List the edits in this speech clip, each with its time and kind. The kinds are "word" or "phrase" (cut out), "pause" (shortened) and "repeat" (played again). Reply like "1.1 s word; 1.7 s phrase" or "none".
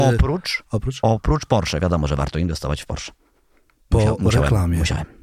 none